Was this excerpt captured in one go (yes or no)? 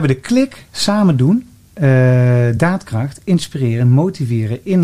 yes